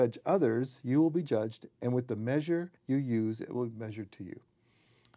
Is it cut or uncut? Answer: cut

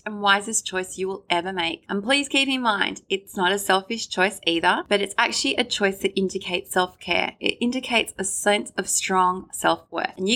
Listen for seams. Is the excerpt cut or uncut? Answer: uncut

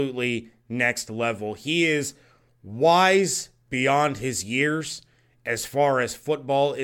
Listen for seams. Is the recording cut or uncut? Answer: uncut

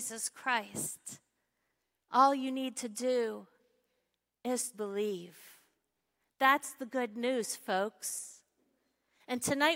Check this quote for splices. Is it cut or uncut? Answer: cut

